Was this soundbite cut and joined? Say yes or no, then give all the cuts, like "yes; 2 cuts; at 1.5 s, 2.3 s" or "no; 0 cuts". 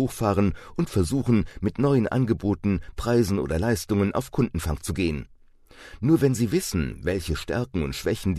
no; 0 cuts